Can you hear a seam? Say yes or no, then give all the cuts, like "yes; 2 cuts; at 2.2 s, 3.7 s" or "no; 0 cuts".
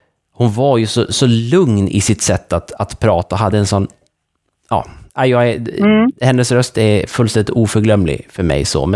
no; 0 cuts